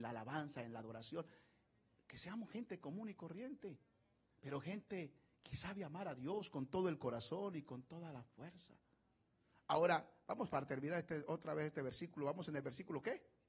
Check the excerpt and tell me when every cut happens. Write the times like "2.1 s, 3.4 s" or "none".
none